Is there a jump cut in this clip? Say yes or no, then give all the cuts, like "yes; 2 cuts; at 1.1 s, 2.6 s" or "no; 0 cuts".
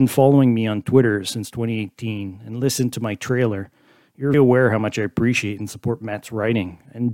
yes; 1 cut; at 4.3 s